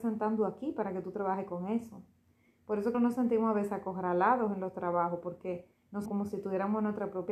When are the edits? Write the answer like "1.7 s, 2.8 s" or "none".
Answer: 2.9 s, 6.1 s